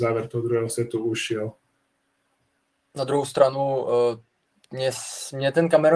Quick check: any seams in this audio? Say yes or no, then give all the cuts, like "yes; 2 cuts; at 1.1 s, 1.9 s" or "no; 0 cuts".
no; 0 cuts